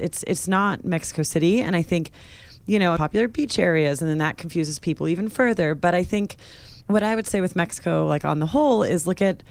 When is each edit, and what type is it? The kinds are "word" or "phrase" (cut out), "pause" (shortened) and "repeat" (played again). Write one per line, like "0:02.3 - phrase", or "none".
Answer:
0:03.0 - phrase
0:06.8 - pause